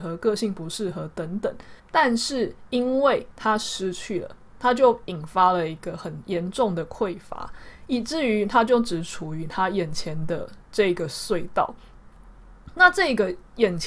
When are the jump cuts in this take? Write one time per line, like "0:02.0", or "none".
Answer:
0:01.8